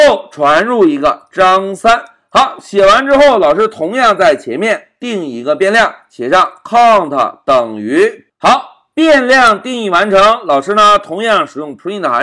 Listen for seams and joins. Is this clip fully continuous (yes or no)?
yes